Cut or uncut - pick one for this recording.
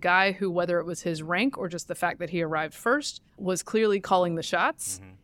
cut